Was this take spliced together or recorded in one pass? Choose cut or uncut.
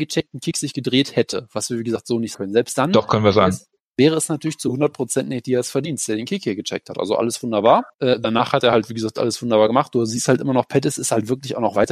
cut